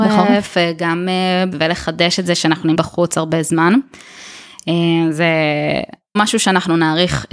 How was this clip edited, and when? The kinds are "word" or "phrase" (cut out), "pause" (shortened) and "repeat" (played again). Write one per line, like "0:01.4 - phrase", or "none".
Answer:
0:01.5 - word
0:02.7 - word
0:06.2 - word